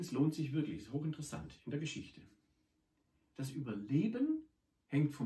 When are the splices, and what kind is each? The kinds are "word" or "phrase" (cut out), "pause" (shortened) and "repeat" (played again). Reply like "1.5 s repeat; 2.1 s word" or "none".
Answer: none